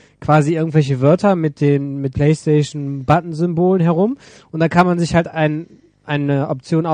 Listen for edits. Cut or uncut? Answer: cut